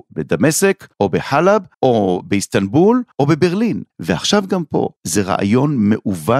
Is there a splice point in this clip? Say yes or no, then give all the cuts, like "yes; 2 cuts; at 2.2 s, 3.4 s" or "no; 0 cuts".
yes; 5 cuts; at 0.9 s, 1.7 s, 3.1 s, 3.9 s, 5.0 s